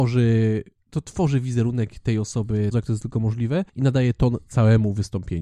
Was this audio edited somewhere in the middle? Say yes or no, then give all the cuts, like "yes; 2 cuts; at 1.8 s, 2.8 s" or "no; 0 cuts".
yes; 2 cuts; at 2.7 s, 3.7 s